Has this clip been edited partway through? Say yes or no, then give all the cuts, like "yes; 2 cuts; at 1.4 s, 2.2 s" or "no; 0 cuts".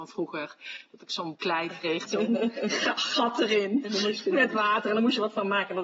yes; 2 cuts; at 1.3 s, 2.1 s